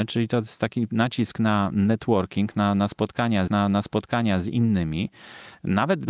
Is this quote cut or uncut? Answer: cut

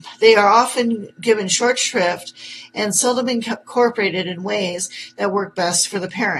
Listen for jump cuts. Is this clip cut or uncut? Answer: uncut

